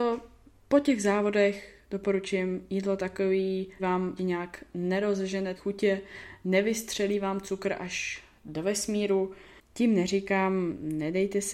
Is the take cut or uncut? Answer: cut